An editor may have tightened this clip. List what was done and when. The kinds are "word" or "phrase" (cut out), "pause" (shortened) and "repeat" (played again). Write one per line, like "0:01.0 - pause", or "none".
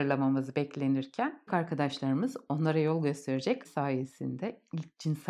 0:01.5 - word
0:03.6 - word

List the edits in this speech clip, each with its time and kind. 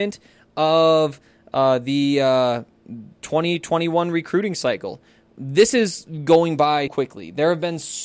0:06.9 - word

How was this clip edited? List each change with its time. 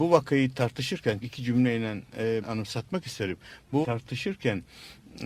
0:01.2 - word
0:02.4 - word
0:03.8 - word

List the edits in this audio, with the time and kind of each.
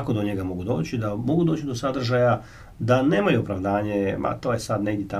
none

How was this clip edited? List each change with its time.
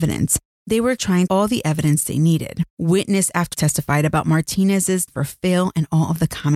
0:01.0 - word
0:01.3 - phrase
0:02.7 - pause
0:03.5 - word
0:05.1 - word

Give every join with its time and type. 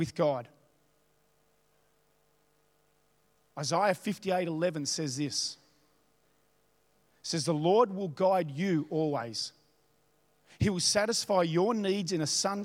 none

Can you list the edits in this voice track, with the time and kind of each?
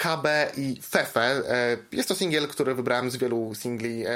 none

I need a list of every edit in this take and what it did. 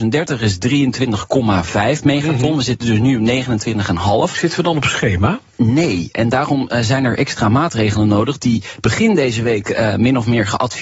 none

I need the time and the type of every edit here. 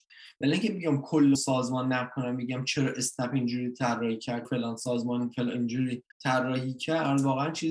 0:01.3 - word
0:04.4 - word
0:06.1 - pause

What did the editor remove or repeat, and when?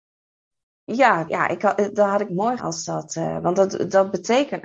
0:01.3 - word
0:02.6 - word

